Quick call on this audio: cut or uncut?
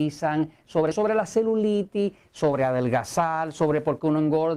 cut